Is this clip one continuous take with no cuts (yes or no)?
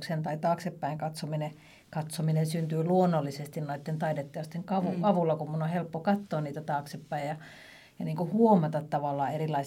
yes